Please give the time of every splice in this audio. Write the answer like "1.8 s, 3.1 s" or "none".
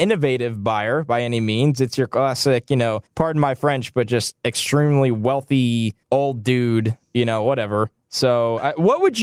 3.1 s, 6.0 s